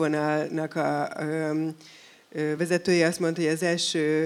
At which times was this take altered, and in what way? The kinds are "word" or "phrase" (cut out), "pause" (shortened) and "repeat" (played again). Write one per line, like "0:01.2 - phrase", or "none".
none